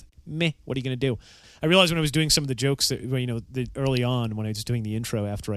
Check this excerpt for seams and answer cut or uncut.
uncut